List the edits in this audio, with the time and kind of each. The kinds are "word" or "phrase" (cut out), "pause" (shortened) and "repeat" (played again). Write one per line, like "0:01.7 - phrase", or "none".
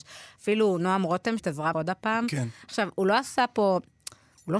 0:01.4 - word
0:01.7 - word